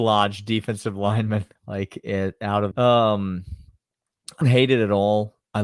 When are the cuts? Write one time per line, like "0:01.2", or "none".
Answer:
0:01.6
0:02.7
0:04.4